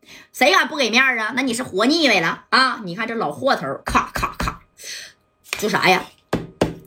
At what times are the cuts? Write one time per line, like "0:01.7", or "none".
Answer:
0:03.8